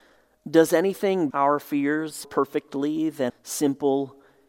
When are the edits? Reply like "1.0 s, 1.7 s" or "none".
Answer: 1.3 s, 2.2 s, 3.3 s